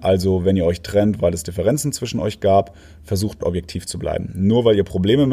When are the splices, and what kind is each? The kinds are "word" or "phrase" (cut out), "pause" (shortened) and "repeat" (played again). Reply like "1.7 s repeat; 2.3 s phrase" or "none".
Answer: 3.4 s phrase